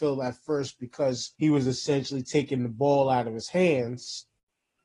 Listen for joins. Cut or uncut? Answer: cut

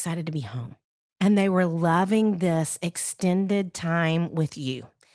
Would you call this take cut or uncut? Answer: uncut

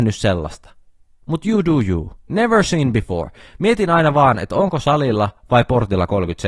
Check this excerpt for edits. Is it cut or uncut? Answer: uncut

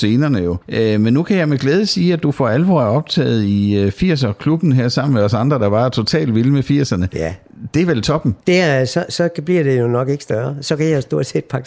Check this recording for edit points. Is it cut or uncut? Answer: uncut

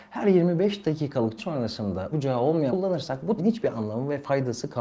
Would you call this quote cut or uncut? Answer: cut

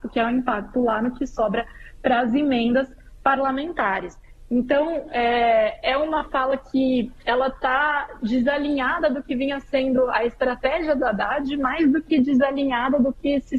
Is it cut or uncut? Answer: uncut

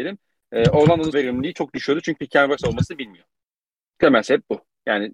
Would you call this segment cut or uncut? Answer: cut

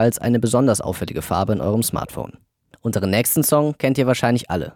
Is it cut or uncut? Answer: uncut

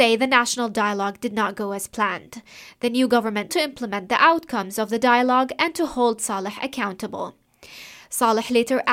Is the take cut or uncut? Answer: cut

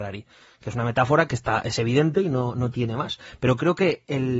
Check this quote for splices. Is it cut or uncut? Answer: uncut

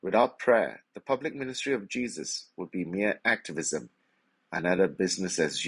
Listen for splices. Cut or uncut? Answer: uncut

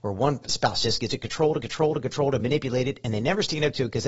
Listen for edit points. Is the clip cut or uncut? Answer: cut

